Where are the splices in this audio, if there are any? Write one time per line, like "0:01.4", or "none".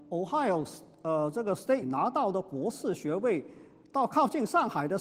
0:01.8